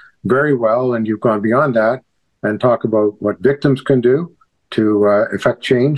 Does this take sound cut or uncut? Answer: uncut